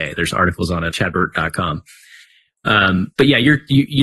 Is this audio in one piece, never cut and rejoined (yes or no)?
no